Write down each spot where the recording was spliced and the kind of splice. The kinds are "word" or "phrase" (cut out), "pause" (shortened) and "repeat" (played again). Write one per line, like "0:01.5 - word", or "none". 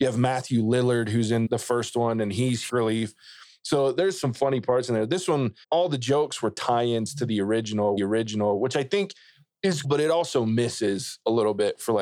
0:01.5 - word
0:02.7 - phrase
0:05.6 - pause
0:08.0 - repeat
0:09.8 - word